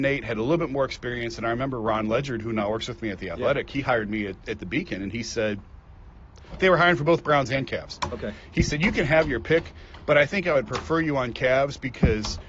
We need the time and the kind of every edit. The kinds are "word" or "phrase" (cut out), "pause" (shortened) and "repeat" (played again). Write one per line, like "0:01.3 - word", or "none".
none